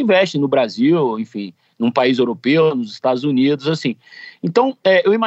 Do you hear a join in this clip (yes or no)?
no